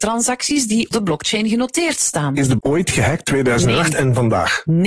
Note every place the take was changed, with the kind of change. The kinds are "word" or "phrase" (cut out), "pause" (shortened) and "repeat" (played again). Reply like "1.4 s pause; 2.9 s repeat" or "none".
0.9 s word; 2.6 s word; 3.2 s word